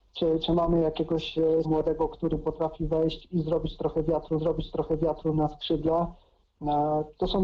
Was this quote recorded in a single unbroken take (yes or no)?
no